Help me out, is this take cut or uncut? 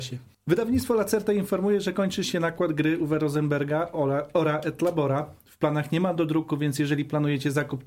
uncut